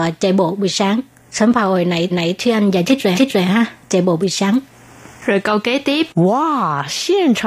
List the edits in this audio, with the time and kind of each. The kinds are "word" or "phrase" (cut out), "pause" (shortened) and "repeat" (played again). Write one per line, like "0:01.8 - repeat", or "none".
0:02.1 - repeat
0:03.1 - repeat
0:06.1 - pause